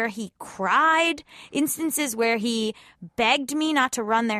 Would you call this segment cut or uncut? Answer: uncut